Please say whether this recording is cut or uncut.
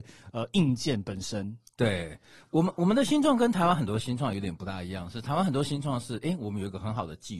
uncut